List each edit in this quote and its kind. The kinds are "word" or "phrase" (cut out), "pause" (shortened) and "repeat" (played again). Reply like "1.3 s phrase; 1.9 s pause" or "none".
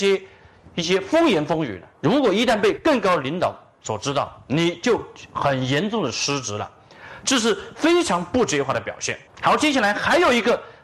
1.9 s pause; 9.3 s pause